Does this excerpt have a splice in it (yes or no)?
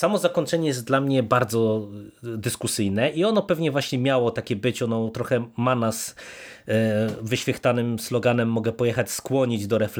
no